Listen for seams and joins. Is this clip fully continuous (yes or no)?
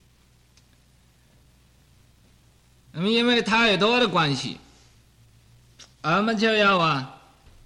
no